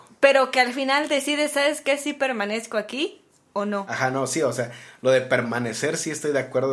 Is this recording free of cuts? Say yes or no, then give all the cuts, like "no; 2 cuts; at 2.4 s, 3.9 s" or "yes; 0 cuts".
yes; 0 cuts